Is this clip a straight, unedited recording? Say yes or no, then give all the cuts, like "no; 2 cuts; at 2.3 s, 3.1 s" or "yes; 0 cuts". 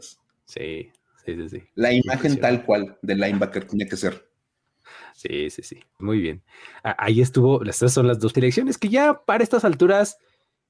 no; 3 cuts; at 3.7 s, 6.0 s, 8.3 s